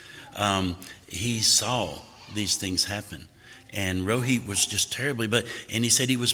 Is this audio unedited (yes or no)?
yes